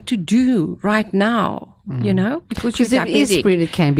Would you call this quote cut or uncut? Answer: uncut